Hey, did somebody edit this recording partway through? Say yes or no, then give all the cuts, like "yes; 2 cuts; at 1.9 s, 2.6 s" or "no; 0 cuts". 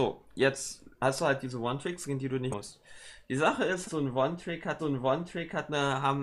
yes; 3 cuts; at 2.5 s, 3.8 s, 4.8 s